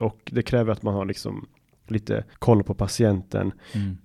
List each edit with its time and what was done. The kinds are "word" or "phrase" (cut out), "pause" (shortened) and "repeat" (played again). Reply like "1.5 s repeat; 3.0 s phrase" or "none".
2.3 s pause

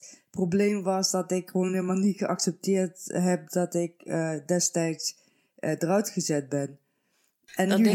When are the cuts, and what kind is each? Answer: none

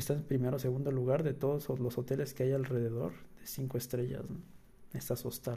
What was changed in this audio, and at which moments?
none

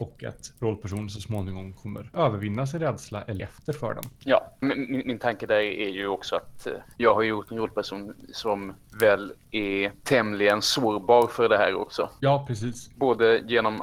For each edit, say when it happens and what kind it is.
2.1 s word; 3.4 s word; 4.6 s word

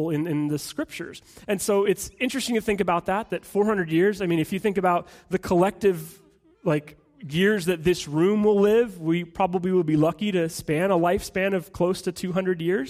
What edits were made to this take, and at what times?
none

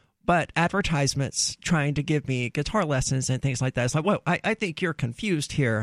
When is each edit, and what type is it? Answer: none

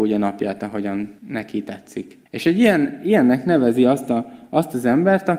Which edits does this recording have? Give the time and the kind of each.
1.2 s pause; 2.3 s pause

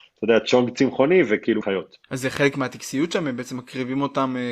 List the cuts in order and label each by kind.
1.6 s phrase; 2.0 s pause

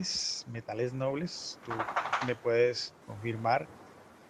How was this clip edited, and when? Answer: 3.0 s pause

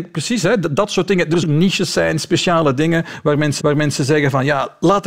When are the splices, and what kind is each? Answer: 1.4 s phrase; 3.6 s repeat

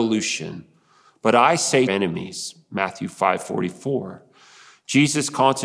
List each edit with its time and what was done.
1.9 s phrase

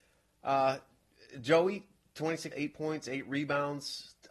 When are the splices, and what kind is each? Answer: 2.5 s word

